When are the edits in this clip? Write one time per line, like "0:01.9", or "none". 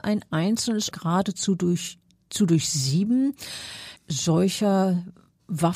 0:00.9
0:04.0

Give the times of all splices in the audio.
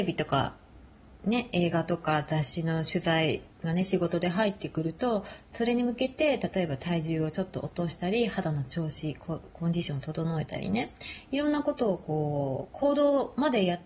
0:03.5

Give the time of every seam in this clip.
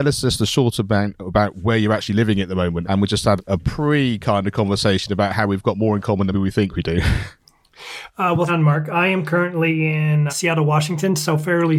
0:02.8
0:03.4
0:06.3
0:08.5
0:10.3

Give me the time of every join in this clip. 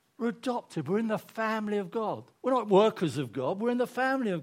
0:02.3

